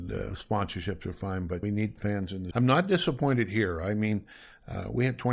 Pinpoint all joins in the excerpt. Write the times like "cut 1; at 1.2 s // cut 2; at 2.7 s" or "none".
cut 1; at 1.6 s // cut 2; at 2.5 s